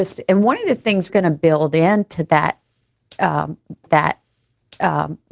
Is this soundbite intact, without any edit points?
no; 2 cuts; at 1.1 s, 3.9 s

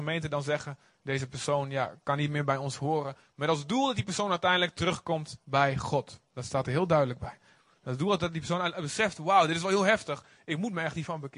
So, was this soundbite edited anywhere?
no; 0 cuts

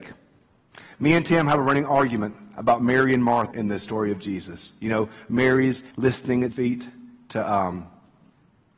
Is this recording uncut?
no; 3 cuts; at 3.5 s, 5.9 s, 6.5 s

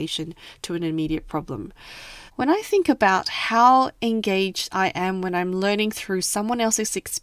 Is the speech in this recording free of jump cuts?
no; 1 cut; at 2.3 s

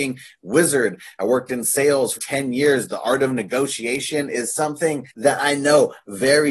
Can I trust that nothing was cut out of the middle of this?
no; 2 cuts; at 2.2 s, 5.1 s

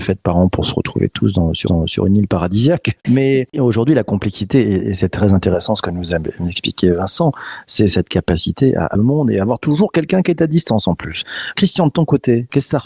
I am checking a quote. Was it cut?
yes; 2 cuts; at 1.7 s, 8.9 s

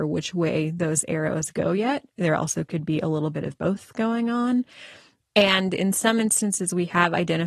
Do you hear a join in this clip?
no; 0 cuts

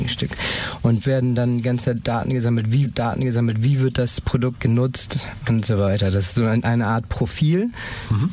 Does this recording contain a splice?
yes; 4 cuts; at 1.0 s, 2.8 s, 4.6 s, 6.3 s

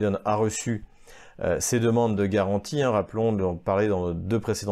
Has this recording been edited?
no; 0 cuts

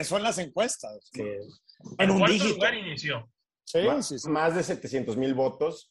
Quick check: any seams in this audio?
yes; 3 cuts; at 1.1 s, 2.0 s, 4.2 s

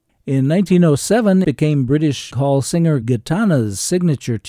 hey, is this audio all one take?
no; 3 cuts; at 1.4 s, 2.3 s, 3.0 s

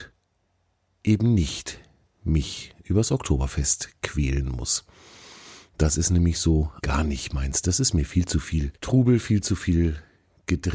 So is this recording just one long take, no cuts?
no; 2 cuts; at 6.8 s, 8.8 s

